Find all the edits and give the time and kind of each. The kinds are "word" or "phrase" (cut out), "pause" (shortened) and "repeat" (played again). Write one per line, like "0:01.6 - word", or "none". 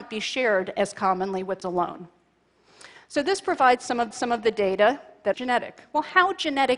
0:01.6 - word
0:04.1 - repeat
0:05.3 - phrase